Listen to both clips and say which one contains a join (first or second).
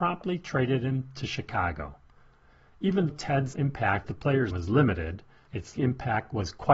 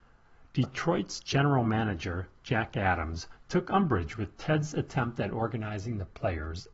first